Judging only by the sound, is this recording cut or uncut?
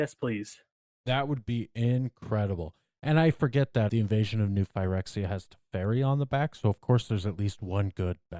cut